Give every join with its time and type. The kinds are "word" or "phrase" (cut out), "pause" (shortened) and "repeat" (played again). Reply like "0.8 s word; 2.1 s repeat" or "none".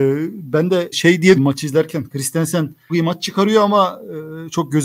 0.9 s word; 1.3 s word; 2.9 s word